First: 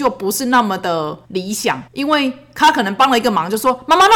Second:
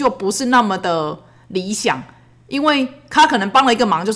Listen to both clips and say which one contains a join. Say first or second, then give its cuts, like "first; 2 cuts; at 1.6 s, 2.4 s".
first; 2 cuts; at 1.2 s, 1.9 s